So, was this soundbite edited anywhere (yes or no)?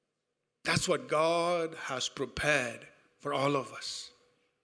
no